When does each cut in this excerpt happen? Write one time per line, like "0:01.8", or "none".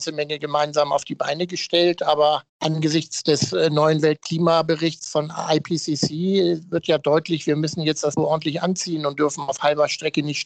0:02.5
0:08.2